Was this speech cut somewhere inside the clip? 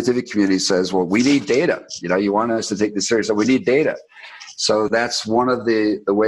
no; 0 cuts

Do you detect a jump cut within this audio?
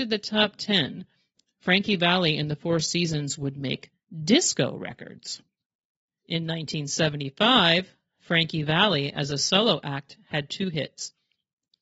no; 0 cuts

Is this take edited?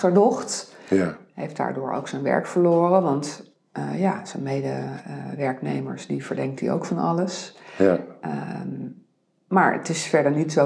no; 0 cuts

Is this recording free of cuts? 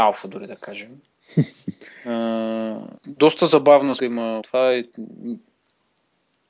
no; 3 cuts; at 3.0 s, 4.0 s, 4.4 s

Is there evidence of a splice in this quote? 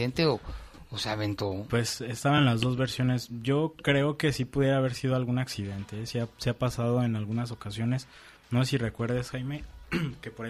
no; 0 cuts

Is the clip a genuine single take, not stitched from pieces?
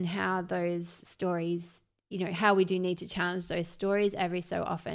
yes; 0 cuts

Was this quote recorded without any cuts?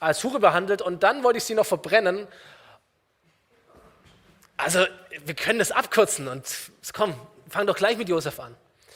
yes; 0 cuts

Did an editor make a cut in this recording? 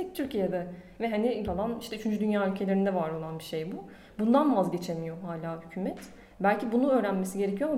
yes; 1 cut; at 1.4 s

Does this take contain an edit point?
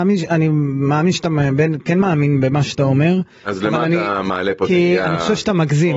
no; 0 cuts

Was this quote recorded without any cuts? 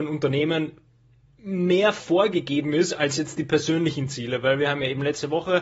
yes; 0 cuts

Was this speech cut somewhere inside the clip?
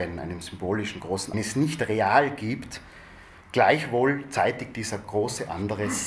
yes; 1 cut; at 1.3 s

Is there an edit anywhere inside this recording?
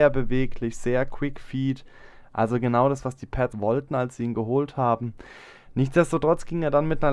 yes; 1 cut; at 3.5 s

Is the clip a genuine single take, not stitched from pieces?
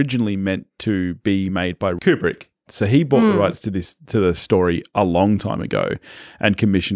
yes; 0 cuts

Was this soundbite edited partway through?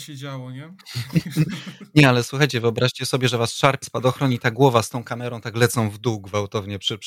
yes; 1 cut; at 3.8 s

